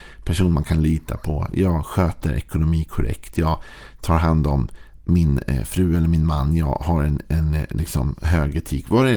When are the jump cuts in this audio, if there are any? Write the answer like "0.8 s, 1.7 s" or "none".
none